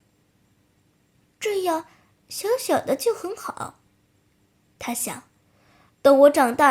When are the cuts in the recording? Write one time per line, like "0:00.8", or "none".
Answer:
none